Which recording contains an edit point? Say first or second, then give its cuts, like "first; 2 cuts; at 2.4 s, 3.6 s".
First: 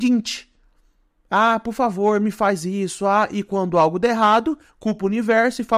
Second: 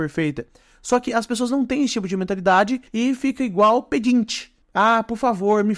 second; 2 cuts; at 2.9 s, 4.6 s